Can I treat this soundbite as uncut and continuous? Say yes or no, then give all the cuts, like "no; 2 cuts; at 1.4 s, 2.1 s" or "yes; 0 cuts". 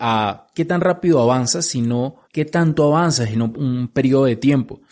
no; 2 cuts; at 2.2 s, 3.5 s